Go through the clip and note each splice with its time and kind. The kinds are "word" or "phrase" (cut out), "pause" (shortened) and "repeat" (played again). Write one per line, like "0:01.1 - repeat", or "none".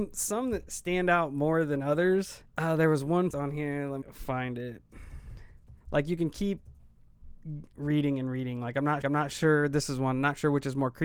0:02.5 - pause
0:03.3 - word
0:04.0 - word
0:05.8 - pause
0:09.0 - repeat